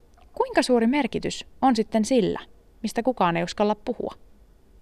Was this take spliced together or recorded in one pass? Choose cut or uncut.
uncut